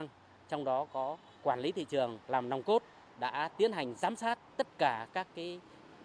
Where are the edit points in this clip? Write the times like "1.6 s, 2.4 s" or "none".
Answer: 1.3 s, 2.2 s, 3.1 s, 4.5 s